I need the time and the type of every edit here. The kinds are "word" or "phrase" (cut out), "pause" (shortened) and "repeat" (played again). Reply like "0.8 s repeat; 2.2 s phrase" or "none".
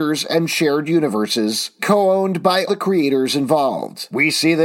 1.8 s word; 2.7 s word

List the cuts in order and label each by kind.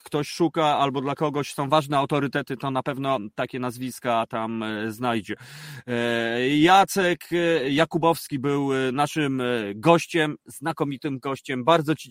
none

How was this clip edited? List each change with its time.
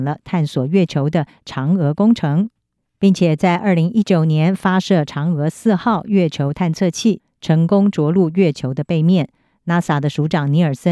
none

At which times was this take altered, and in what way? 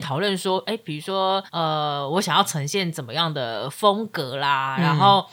1.5 s pause

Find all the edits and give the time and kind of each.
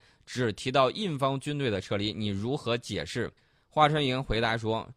3.4 s pause

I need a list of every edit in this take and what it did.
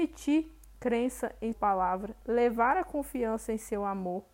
1.5 s word

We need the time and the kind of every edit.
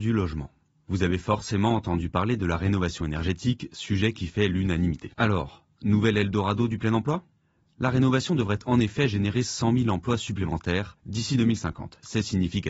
5.1 s pause

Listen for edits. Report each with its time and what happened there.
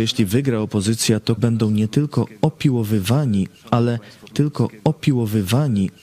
1.4 s word; 4.3 s repeat

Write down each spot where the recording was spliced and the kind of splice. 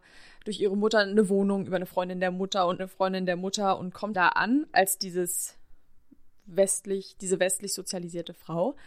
2.8 s phrase; 4.1 s word

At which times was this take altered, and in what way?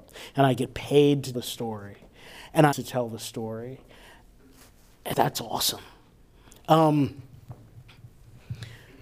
1.3 s word; 2.7 s word; 5.1 s word

